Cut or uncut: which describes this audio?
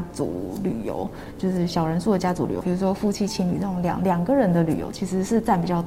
cut